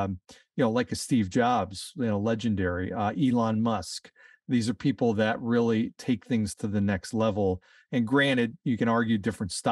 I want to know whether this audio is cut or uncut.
uncut